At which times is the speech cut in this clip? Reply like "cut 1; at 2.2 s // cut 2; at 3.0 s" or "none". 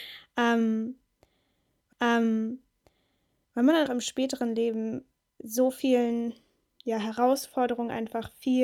cut 1; at 1.9 s // cut 2; at 3.9 s